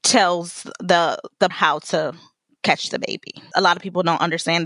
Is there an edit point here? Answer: yes; 2 cuts; at 1.5 s, 3.5 s

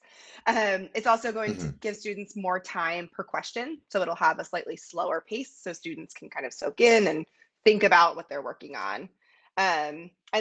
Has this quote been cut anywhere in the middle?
no; 0 cuts

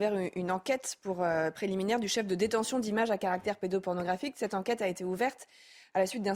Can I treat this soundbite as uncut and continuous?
yes; 0 cuts

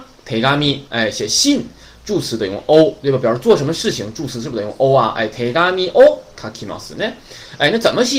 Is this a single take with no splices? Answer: yes; 0 cuts

